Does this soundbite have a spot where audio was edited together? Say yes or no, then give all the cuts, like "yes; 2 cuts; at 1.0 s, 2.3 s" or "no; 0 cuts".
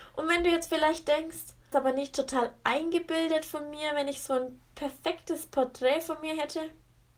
yes; 1 cut; at 1.7 s